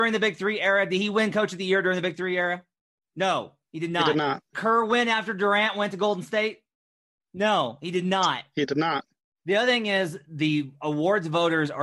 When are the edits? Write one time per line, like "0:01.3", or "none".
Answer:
0:04.5